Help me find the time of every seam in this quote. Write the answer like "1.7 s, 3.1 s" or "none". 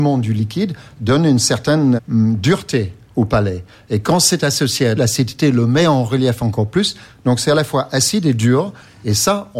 2.0 s, 5.0 s